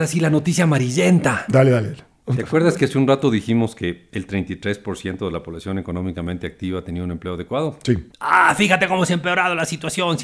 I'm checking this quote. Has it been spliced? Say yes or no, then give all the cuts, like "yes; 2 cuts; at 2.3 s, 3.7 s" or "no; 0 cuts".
yes; 1 cut; at 8.1 s